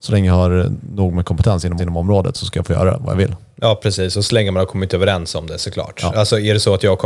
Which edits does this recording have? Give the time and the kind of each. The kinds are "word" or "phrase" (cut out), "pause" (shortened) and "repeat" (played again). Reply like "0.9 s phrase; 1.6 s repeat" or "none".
1.8 s repeat